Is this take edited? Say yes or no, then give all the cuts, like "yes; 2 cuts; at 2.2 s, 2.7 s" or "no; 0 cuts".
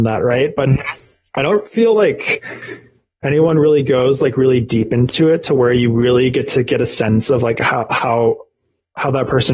no; 0 cuts